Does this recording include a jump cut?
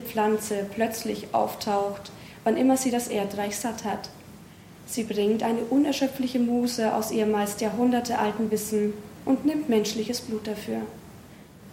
no; 0 cuts

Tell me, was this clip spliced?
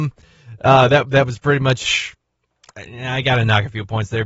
no; 0 cuts

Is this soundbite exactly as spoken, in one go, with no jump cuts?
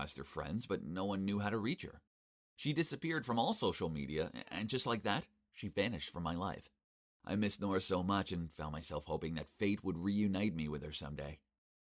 yes; 0 cuts

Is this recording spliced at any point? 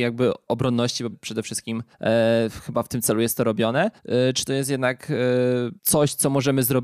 yes; 4 cuts; at 1.1 s, 1.9 s, 4.0 s, 5.8 s

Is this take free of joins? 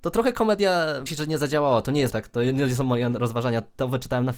no; 2 cuts; at 1.1 s, 2.1 s

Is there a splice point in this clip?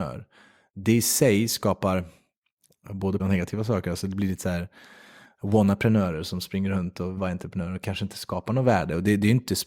yes; 2 cuts; at 3.2 s, 7.2 s

